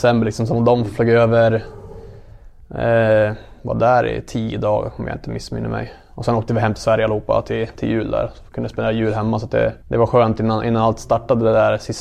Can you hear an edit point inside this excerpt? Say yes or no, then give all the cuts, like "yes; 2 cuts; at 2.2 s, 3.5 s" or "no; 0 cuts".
yes; 1 cut; at 9.8 s